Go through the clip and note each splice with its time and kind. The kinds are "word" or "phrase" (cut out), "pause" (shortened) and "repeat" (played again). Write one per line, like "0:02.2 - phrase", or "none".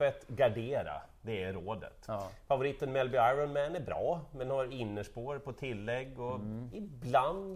none

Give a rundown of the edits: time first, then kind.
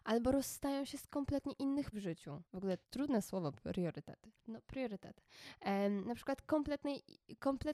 0:01.9 - word
0:02.4 - pause
0:02.8 - pause
0:04.4 - pause

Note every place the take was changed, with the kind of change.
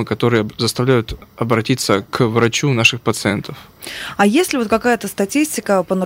none

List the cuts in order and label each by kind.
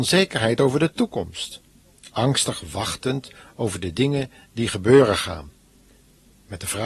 none

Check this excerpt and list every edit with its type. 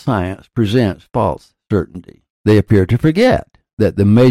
0:02.3 - pause

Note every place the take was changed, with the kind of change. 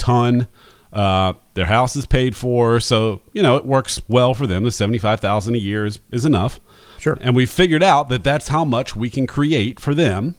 none

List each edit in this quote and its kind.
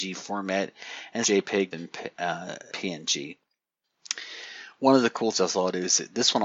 0:01.2 - word
0:01.7 - word
0:02.7 - word
0:05.3 - word

